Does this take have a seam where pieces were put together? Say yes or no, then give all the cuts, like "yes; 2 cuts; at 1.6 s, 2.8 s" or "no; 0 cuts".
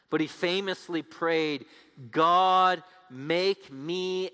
no; 0 cuts